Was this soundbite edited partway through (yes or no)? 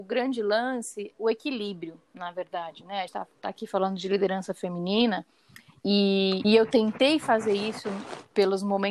yes